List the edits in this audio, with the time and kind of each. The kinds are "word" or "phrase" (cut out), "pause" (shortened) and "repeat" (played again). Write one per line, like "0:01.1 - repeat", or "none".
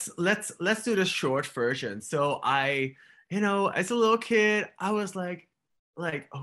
none